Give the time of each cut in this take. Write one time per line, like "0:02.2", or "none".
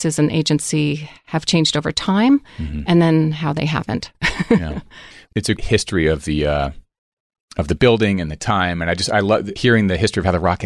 0:05.6
0:09.6